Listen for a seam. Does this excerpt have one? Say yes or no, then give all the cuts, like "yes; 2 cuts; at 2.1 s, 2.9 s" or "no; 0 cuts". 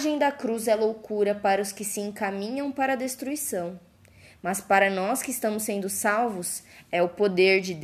no; 0 cuts